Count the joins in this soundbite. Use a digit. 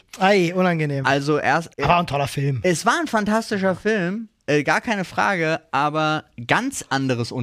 1